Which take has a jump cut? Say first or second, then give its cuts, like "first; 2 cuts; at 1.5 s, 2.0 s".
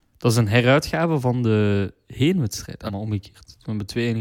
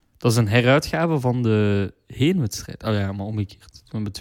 first; 1 cut; at 2.9 s